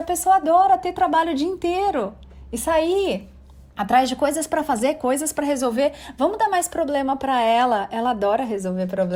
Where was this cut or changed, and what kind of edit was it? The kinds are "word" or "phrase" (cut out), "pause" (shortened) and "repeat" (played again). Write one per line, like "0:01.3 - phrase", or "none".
0:03.7 - pause